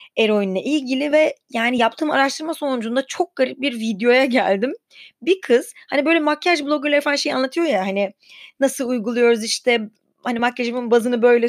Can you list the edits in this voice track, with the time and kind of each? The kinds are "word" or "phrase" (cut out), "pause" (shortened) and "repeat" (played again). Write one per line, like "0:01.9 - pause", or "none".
none